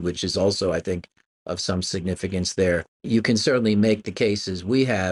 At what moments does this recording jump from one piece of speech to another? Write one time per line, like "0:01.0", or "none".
0:03.0